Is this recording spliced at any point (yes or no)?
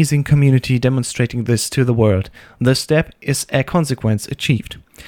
no